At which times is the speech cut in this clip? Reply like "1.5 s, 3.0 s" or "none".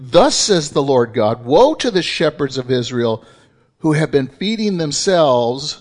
none